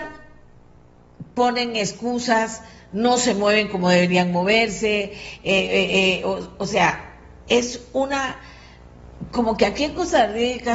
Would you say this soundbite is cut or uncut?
uncut